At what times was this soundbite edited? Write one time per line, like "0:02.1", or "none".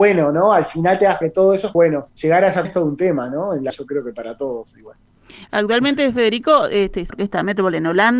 0:01.2
0:01.7
0:02.1
0:02.6
0:03.7
0:07.1